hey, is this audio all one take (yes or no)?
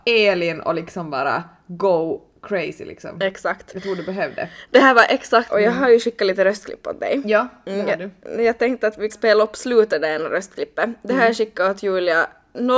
no